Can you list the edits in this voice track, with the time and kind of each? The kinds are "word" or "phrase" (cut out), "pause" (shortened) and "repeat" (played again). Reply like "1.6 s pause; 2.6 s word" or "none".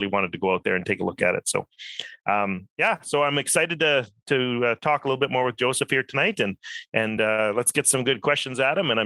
none